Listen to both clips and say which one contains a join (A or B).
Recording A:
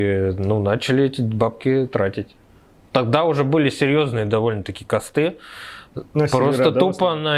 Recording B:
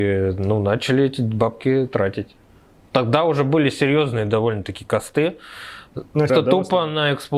B